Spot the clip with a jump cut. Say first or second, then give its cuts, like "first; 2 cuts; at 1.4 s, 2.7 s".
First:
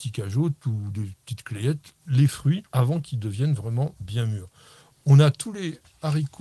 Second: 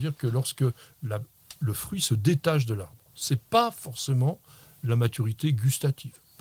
first; 2 cuts; at 2.0 s, 2.7 s